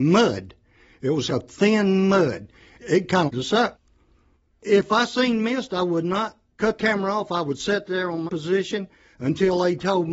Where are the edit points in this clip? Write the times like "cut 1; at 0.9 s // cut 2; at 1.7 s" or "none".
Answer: cut 1; at 1.3 s // cut 2; at 3.3 s // cut 3; at 6.8 s // cut 4; at 7.9 s // cut 5; at 8.3 s